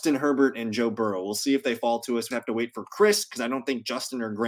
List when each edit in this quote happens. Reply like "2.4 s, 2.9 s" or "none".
2.3 s